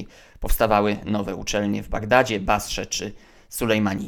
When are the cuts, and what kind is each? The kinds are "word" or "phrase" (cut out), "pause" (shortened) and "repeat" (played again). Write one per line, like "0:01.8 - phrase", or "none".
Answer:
none